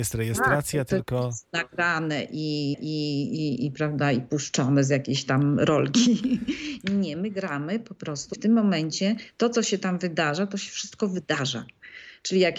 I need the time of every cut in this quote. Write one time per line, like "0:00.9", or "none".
0:02.7
0:08.3